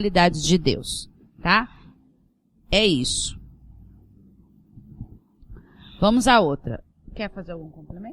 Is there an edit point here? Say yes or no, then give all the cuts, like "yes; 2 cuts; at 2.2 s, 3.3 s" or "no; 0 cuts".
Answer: no; 0 cuts